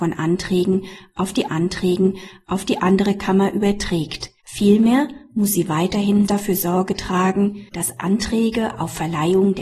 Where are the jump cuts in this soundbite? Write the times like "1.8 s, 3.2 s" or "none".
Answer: 1.5 s, 4.4 s, 6.3 s, 7.7 s